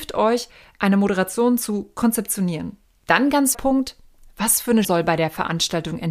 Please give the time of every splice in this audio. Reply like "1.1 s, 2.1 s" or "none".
3.5 s, 4.8 s